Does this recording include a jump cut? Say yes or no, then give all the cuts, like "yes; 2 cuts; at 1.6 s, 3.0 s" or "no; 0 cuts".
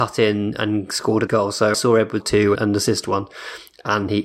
yes; 4 cuts; at 1.3 s, 1.7 s, 2.2 s, 2.5 s